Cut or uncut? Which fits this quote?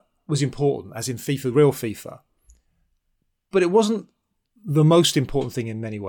uncut